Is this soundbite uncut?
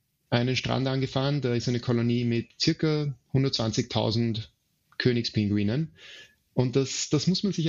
yes; 0 cuts

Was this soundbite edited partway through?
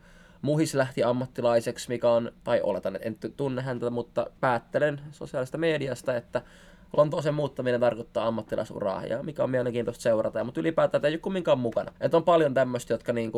yes; 3 cuts; at 2.4 s, 4.4 s, 12.0 s

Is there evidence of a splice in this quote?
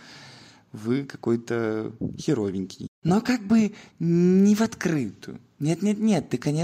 no; 0 cuts

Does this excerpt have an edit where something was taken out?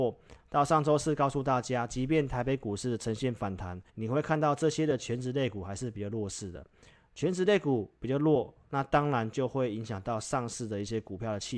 yes; 1 cut; at 3.9 s

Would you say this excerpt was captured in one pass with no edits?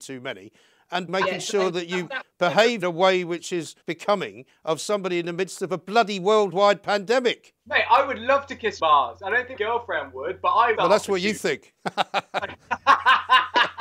no; 6 cuts; at 1.1 s, 2.8 s, 3.8 s, 8.8 s, 9.5 s, 10.7 s

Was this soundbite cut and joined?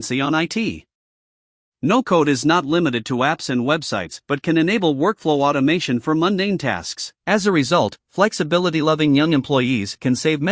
yes; 1 cut; at 7.2 s

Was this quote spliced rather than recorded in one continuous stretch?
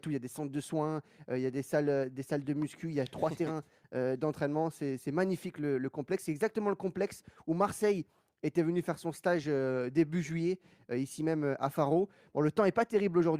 no; 0 cuts

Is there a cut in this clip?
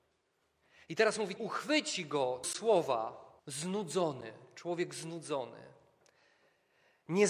yes; 3 cuts; at 1.4 s, 2.4 s, 3.4 s

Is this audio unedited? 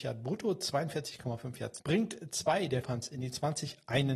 no; 2 cuts; at 1.8 s, 2.8 s

